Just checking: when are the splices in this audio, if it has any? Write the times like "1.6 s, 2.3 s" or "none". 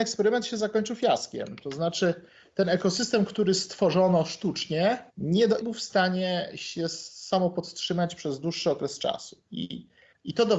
5.1 s, 5.6 s